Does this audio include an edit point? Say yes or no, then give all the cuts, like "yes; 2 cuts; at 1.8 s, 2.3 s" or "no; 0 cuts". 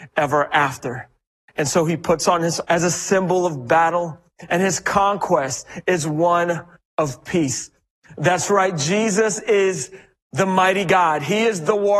yes; 1 cut; at 2.6 s